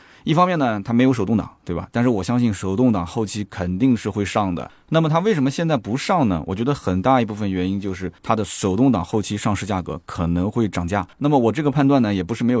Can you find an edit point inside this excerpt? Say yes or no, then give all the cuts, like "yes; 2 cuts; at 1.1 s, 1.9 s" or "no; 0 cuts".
yes; 2 cuts; at 8.2 s, 11.1 s